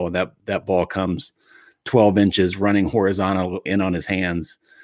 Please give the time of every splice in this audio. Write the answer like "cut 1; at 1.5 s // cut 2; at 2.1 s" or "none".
cut 1; at 3.7 s